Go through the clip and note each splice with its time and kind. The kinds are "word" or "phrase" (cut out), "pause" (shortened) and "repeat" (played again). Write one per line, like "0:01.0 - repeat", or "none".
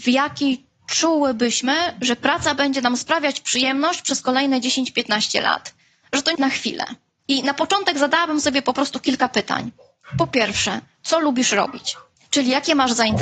0:06.3 - word